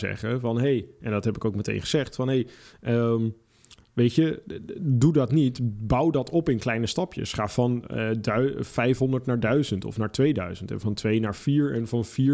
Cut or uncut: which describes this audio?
uncut